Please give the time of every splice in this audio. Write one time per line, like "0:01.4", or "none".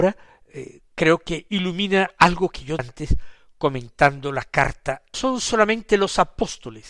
0:02.8
0:05.1